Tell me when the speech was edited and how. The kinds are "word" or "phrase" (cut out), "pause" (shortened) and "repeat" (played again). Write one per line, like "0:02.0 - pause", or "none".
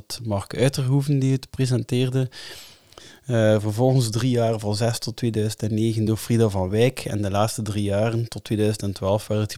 none